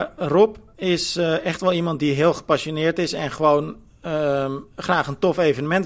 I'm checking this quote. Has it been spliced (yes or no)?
no